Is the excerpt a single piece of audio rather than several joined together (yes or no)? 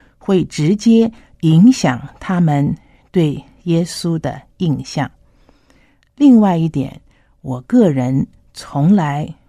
yes